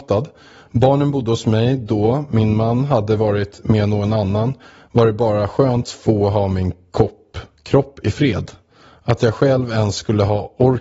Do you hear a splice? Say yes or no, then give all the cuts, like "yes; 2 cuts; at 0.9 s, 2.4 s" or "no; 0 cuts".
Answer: yes; 1 cut; at 5.8 s